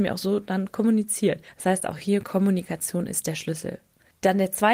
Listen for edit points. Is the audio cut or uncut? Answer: uncut